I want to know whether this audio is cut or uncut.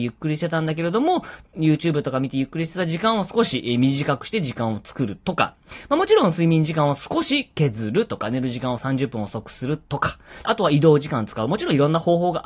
cut